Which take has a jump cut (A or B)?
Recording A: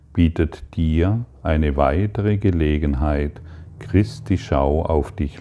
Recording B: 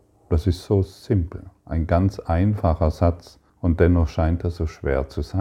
B